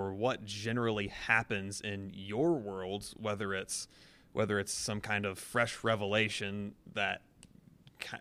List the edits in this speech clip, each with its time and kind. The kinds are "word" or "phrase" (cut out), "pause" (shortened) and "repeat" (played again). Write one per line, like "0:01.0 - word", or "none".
none